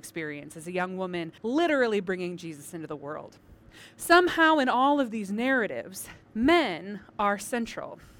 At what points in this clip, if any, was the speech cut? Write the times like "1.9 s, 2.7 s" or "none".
1.4 s, 6.2 s